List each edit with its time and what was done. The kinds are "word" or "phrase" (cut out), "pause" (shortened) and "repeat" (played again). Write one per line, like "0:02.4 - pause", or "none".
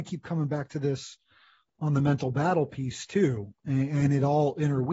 none